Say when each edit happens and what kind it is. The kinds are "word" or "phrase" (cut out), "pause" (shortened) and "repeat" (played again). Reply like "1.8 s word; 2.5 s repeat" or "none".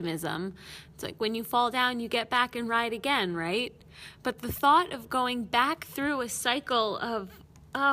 none